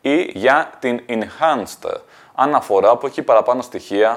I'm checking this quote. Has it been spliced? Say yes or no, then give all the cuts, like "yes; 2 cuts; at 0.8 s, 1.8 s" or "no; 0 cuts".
no; 0 cuts